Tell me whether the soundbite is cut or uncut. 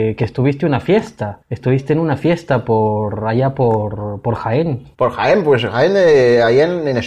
cut